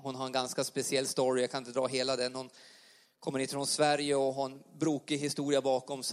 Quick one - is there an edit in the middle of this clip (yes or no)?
no